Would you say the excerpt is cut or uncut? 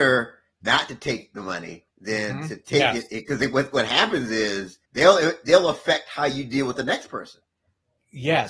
cut